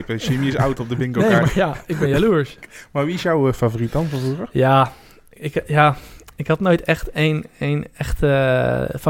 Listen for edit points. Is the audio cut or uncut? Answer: uncut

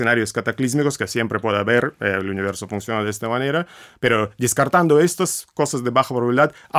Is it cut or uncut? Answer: uncut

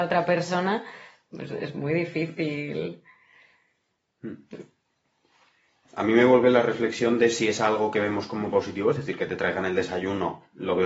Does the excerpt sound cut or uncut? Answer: uncut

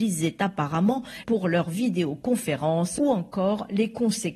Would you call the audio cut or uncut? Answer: cut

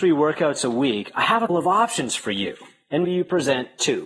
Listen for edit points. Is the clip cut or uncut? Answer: cut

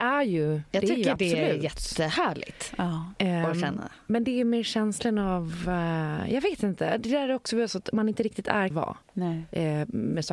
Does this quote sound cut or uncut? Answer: cut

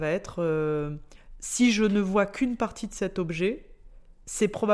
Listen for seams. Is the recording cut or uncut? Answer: uncut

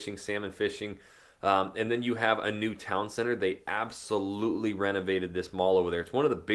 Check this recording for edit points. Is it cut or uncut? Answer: uncut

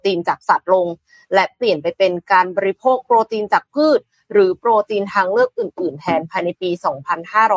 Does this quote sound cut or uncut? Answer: uncut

